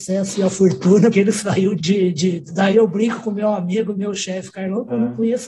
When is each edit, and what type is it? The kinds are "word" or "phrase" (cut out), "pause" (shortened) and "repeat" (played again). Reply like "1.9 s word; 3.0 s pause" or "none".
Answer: 1.1 s word; 1.8 s word; 2.7 s word